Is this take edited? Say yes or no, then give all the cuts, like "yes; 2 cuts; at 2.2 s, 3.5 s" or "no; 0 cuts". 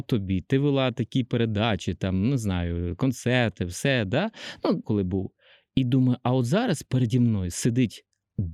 yes; 1 cut; at 4.8 s